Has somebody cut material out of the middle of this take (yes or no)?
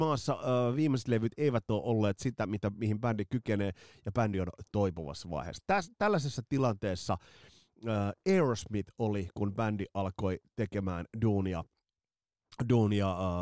no